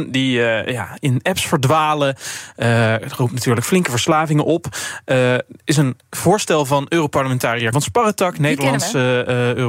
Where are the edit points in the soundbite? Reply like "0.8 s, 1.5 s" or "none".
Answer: 7.7 s

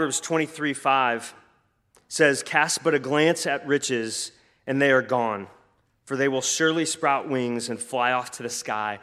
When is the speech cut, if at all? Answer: none

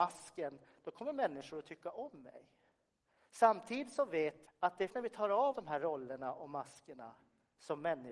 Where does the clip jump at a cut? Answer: 4.5 s, 4.9 s, 5.5 s

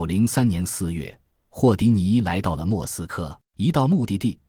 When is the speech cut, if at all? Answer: 3.4 s

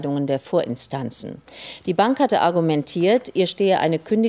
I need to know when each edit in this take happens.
none

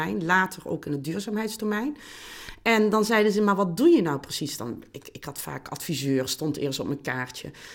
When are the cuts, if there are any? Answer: none

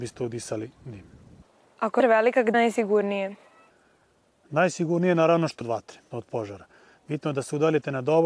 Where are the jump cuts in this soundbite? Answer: 2.0 s, 2.5 s, 5.6 s, 6.1 s

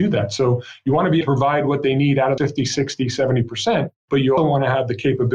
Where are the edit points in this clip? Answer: 1.2 s, 2.4 s, 4.0 s, 4.4 s

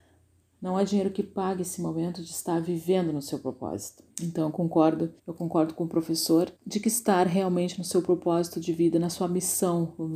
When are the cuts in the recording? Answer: 4.1 s, 5.2 s, 6.6 s

